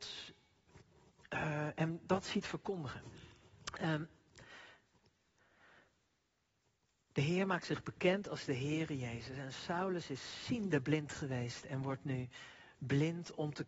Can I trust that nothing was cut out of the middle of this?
yes; 0 cuts

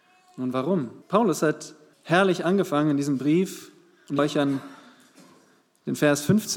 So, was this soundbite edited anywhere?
yes; 3 cuts; at 1.0 s, 1.9 s, 4.2 s

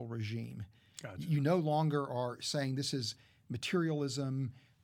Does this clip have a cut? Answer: no; 0 cuts

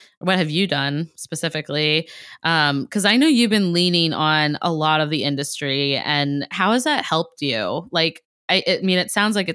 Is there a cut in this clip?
no; 0 cuts

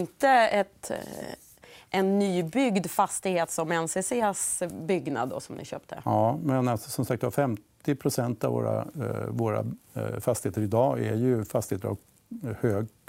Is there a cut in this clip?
no; 0 cuts

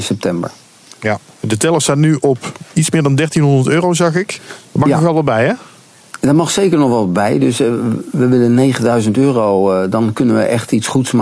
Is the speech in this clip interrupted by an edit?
yes; 1 cut; at 4.6 s

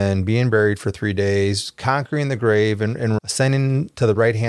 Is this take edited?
yes; 1 cut; at 3.2 s

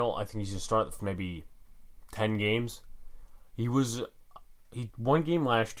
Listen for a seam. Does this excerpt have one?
yes; 2 cuts; at 1.0 s, 4.9 s

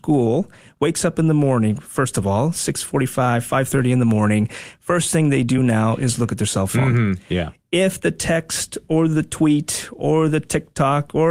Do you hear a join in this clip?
no; 0 cuts

